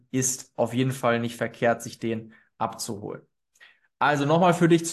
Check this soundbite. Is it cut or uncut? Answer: uncut